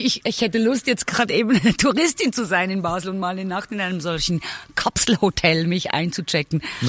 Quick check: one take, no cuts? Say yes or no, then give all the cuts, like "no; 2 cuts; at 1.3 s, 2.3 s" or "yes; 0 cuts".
yes; 0 cuts